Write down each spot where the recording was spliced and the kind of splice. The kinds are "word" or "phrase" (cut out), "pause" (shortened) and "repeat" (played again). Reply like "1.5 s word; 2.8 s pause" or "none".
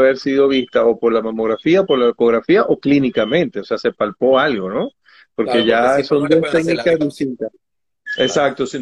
none